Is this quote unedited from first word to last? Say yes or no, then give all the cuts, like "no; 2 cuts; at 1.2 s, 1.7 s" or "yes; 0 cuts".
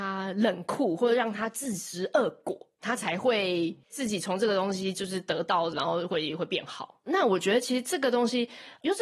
no; 2 cuts; at 3.8 s, 5.7 s